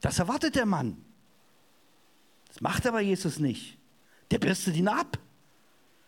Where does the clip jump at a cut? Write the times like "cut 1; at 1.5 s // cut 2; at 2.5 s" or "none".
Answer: none

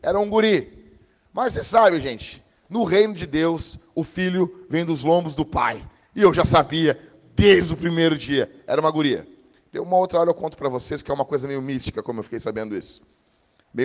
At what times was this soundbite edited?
none

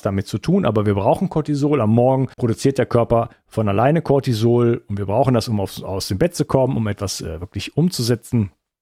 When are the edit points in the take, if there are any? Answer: cut 1; at 2.3 s

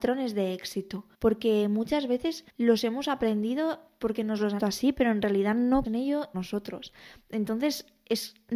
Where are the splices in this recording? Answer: cut 1; at 1.1 s // cut 2; at 2.5 s // cut 3; at 4.6 s // cut 4; at 5.8 s // cut 5; at 6.3 s

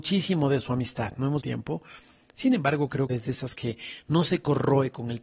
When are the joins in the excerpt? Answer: cut 1; at 1.4 s // cut 2; at 3.1 s // cut 3; at 3.5 s

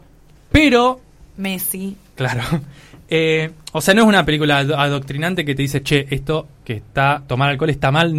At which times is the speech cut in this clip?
none

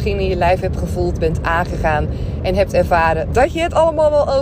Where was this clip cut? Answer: none

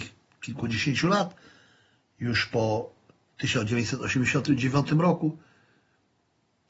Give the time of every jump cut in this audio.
none

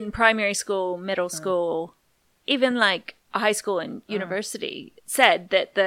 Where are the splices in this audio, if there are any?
none

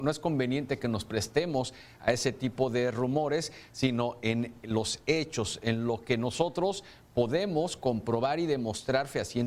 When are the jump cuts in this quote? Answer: none

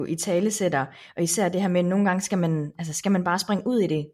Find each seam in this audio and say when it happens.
none

